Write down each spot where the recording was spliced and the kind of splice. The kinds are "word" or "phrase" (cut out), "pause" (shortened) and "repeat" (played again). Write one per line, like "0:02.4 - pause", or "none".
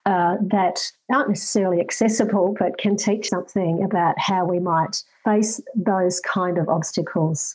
0:03.3 - word